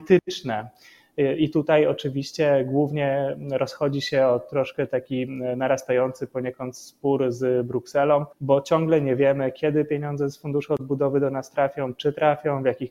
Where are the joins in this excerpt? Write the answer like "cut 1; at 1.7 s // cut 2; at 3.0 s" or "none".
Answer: cut 1; at 8.3 s